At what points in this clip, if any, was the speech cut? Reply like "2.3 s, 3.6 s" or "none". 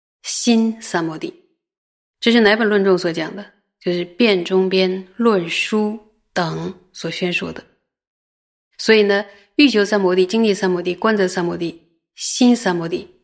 none

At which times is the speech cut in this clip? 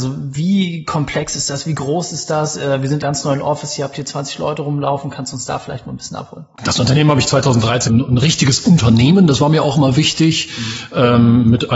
3.0 s, 7.9 s

